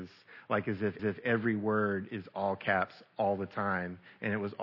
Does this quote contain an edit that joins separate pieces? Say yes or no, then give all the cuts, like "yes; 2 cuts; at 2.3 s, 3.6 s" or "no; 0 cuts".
yes; 1 cut; at 1.0 s